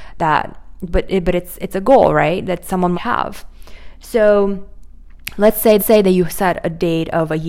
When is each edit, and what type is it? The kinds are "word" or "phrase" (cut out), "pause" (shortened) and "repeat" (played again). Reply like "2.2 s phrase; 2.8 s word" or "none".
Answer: 2.9 s phrase; 5.8 s repeat